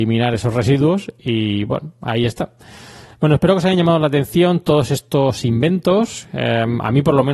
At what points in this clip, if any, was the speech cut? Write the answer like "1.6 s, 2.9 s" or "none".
none